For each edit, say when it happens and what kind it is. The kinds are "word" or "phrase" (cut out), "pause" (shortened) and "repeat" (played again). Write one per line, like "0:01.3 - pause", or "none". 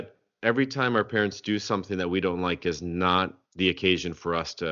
0:03.5 - pause